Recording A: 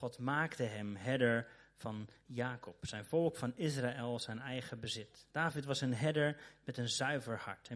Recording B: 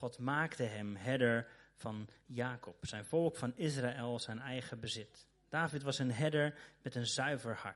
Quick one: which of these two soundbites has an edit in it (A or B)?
A